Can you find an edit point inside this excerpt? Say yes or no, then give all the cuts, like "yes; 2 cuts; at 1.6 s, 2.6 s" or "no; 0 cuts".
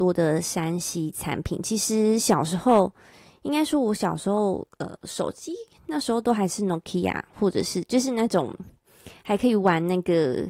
no; 0 cuts